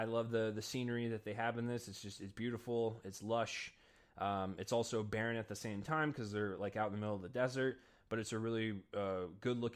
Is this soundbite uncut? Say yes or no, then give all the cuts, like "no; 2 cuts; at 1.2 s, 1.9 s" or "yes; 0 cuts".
yes; 0 cuts